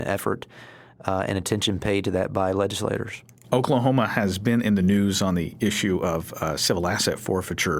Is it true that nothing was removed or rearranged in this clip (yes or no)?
yes